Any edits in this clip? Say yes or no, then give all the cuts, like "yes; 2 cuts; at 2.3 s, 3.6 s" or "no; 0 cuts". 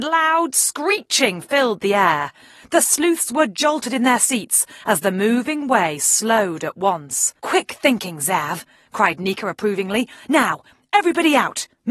yes; 1 cut; at 7.4 s